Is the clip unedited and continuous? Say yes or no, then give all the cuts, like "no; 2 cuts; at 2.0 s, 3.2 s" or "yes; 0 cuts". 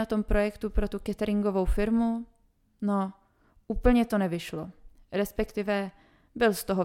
yes; 0 cuts